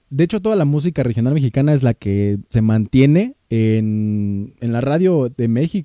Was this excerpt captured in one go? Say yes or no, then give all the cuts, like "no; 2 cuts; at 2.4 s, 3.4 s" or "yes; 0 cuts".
no; 2 cuts; at 2.5 s, 3.4 s